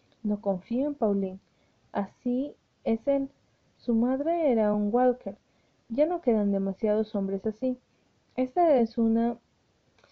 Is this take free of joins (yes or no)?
yes